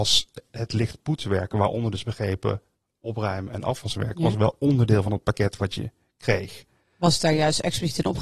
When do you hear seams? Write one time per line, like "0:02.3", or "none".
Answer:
none